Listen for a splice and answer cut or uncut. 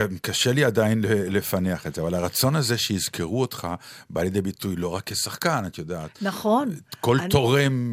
uncut